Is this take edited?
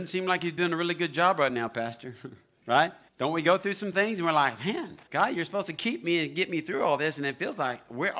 yes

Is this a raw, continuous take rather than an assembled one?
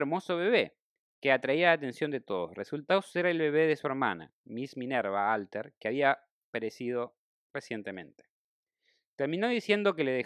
yes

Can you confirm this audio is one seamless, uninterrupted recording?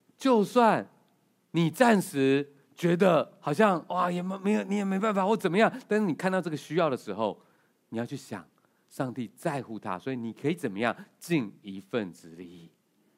yes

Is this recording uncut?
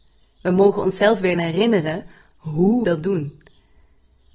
no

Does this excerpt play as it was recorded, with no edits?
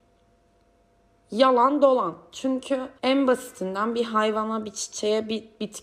no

